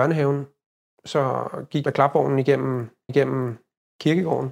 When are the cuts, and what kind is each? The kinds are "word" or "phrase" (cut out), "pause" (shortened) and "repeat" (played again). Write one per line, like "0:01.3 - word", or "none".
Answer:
0:01.8 - word
0:03.1 - repeat